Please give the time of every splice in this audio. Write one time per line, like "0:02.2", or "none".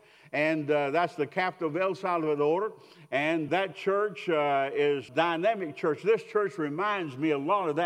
0:03.5
0:05.1